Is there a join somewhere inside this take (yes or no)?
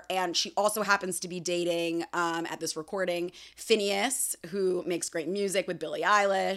yes